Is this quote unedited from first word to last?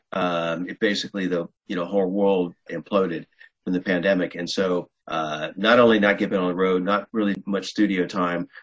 no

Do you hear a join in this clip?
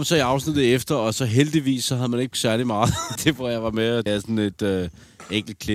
yes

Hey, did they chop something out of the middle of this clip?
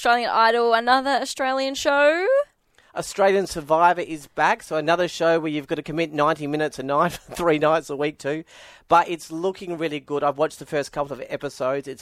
no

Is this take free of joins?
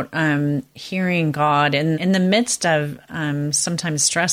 no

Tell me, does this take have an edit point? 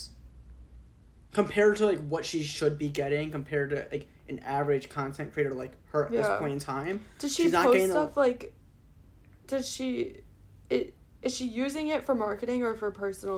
no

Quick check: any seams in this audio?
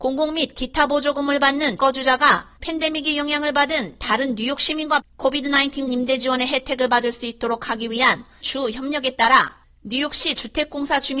yes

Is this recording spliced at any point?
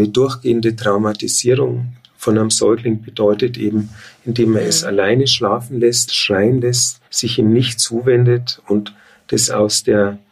yes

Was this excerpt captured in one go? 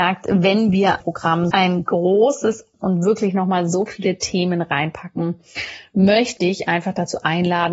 no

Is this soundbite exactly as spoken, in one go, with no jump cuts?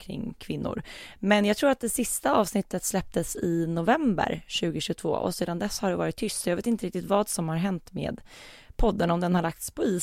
yes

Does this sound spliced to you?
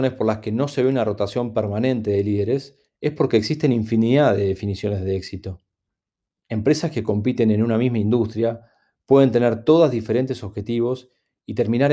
no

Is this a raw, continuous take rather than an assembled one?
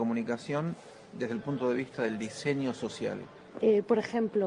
yes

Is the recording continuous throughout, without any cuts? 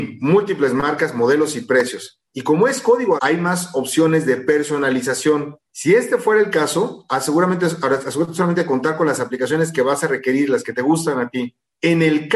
no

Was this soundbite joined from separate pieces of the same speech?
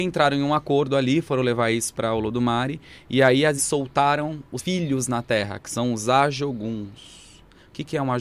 yes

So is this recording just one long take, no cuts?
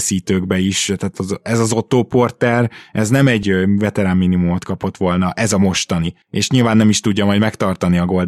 no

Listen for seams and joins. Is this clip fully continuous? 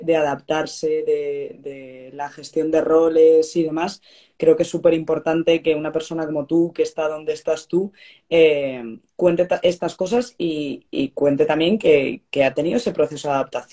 yes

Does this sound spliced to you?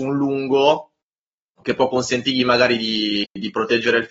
no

